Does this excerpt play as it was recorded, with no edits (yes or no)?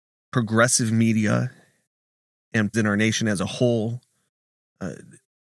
no